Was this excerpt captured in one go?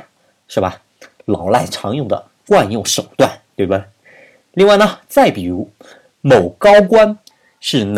yes; 0 cuts

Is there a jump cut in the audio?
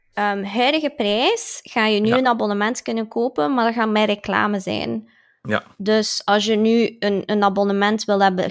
no; 0 cuts

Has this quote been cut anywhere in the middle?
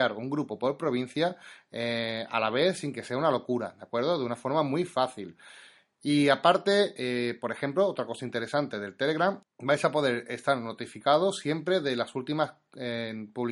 no; 0 cuts

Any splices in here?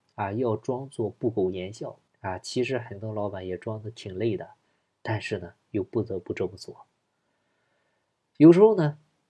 yes; 1 cut; at 2.1 s

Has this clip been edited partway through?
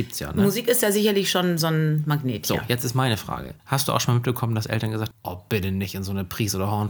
yes; 2 cuts; at 3.6 s, 5.1 s

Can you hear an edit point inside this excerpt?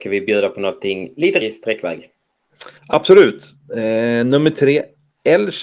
yes; 2 cuts; at 1.4 s, 2.8 s

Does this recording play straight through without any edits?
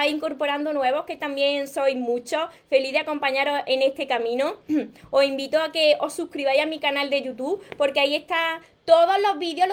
yes; 0 cuts

